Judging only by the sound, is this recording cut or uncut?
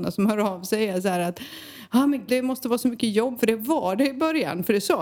cut